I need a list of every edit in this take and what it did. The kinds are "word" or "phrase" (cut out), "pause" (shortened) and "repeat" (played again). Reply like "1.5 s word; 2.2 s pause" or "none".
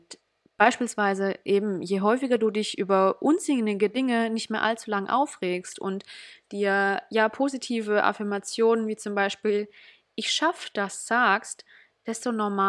none